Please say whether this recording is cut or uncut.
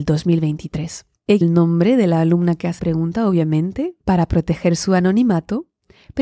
cut